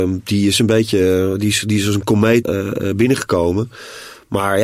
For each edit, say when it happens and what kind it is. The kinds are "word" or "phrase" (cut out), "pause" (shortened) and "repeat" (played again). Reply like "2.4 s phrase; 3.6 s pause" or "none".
2.4 s word